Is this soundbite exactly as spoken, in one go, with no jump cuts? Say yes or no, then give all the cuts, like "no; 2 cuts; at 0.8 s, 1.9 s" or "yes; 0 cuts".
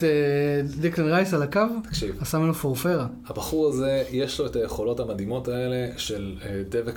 yes; 0 cuts